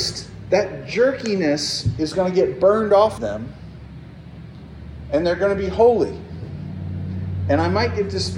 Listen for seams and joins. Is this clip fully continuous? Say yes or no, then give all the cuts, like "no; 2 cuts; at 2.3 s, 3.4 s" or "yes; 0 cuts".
no; 1 cut; at 3.2 s